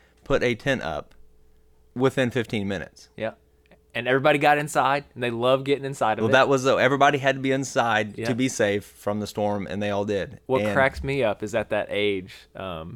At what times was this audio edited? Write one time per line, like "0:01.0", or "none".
none

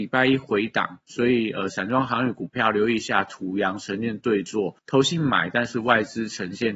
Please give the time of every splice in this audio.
0:04.8

